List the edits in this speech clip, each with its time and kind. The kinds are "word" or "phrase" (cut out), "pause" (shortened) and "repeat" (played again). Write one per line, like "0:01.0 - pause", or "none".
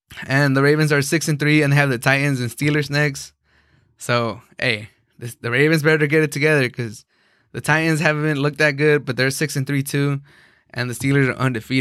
none